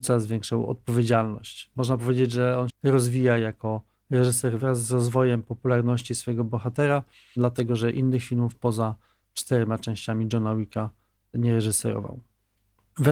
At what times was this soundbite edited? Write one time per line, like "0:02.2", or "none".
0:02.7